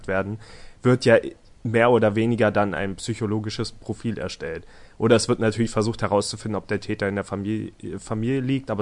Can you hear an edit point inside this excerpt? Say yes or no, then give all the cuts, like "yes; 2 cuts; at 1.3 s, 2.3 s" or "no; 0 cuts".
no; 0 cuts